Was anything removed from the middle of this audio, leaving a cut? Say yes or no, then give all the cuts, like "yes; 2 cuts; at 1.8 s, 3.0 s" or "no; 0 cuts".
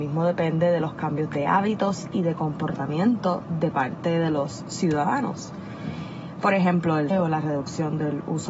yes; 1 cut; at 7.1 s